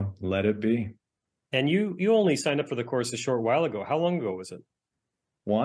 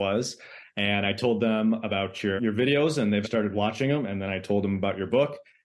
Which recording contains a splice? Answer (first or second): second